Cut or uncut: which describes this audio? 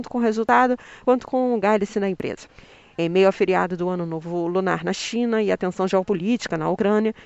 uncut